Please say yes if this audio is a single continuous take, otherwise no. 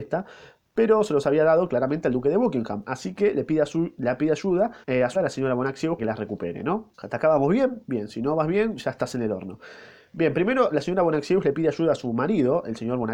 no